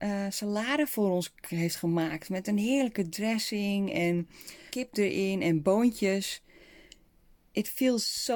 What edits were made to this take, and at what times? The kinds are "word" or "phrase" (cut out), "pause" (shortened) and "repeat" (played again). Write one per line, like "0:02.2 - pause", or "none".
0:04.7 - word